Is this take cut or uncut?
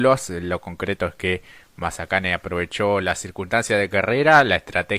uncut